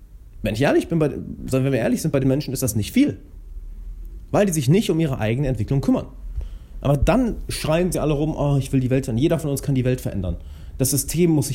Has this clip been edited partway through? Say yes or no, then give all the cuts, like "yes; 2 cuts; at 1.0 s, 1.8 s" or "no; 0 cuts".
yes; 1 cut; at 2.2 s